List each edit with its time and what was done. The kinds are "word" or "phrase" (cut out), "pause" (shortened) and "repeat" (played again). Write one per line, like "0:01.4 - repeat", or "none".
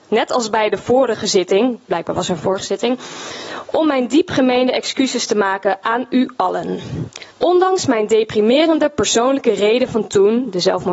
0:07.3 - pause